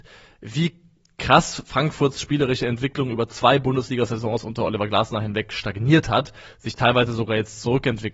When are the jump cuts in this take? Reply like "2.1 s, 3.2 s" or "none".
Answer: none